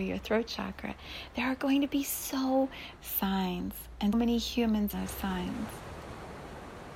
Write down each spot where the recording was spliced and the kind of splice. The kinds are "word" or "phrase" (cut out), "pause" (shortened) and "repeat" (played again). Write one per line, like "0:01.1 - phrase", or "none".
0:03.0 - word
0:04.1 - word
0:04.9 - word

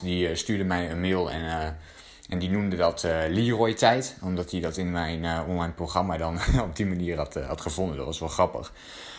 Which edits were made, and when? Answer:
none

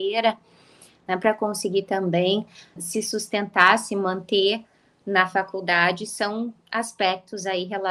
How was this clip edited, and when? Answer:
0:02.8 - word

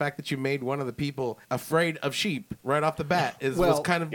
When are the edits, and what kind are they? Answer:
0:01.4 - pause
0:02.6 - pause

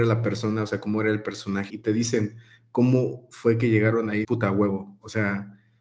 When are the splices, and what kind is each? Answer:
0:01.7 - word
0:04.2 - word

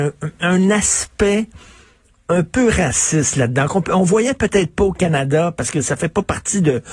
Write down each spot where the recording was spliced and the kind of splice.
none

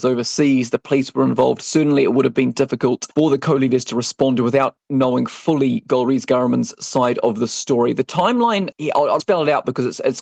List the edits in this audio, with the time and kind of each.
0:03.1 - pause
0:08.7 - word
0:09.2 - word

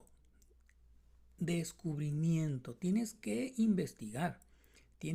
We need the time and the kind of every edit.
none

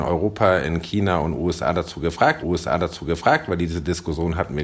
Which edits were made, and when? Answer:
0:02.4 - repeat

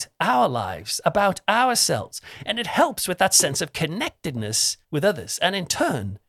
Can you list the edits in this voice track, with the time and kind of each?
0:04.8 - pause

